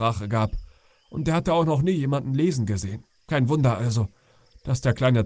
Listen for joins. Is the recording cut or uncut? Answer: cut